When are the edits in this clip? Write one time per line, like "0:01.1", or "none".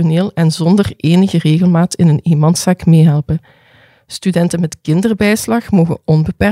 none